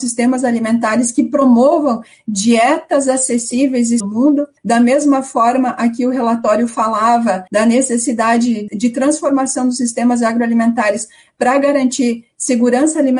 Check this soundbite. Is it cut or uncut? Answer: cut